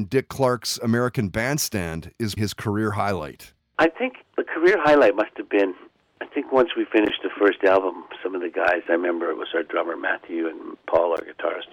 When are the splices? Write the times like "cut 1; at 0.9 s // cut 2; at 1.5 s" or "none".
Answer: cut 1; at 2.4 s // cut 2; at 4.3 s